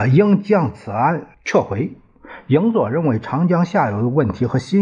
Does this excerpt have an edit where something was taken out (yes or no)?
yes